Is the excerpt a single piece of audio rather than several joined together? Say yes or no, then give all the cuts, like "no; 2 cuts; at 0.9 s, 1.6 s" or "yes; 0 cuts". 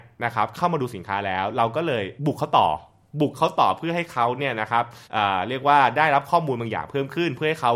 no; 2 cuts; at 2.2 s, 5.0 s